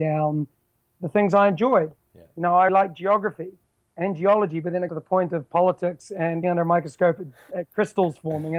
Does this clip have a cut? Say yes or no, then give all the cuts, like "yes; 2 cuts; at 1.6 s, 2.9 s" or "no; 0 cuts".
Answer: yes; 4 cuts; at 2.7 s, 4.9 s, 6.4 s, 7.5 s